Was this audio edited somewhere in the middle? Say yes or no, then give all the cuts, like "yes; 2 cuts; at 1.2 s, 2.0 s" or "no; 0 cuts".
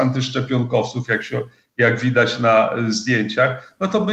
no; 0 cuts